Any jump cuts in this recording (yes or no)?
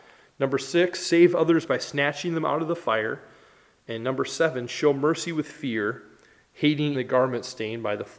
yes